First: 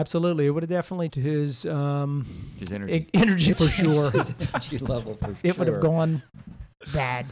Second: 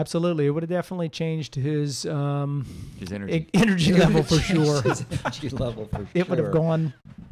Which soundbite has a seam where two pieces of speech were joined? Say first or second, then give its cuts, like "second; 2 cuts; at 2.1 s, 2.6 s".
first; 2 cuts; at 1.1 s, 3.5 s